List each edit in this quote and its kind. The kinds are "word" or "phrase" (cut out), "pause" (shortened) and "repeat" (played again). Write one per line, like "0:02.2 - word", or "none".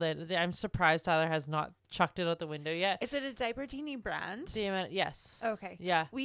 0:01.8 - pause